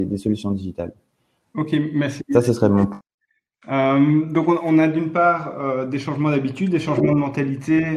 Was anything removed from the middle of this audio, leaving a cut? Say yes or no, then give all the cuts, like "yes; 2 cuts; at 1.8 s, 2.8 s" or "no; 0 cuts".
no; 0 cuts